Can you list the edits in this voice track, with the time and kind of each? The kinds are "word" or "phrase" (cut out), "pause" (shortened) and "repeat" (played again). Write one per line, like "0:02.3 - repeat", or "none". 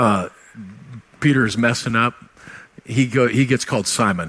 none

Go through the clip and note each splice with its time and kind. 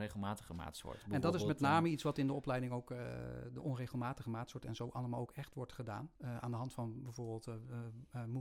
0:06.2 - pause

